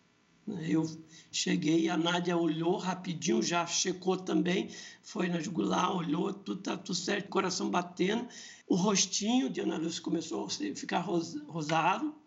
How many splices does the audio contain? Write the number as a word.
two